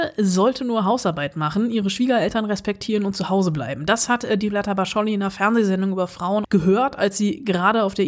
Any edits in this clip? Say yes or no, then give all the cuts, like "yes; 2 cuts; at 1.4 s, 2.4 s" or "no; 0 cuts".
yes; 2 cuts; at 4.5 s, 6.4 s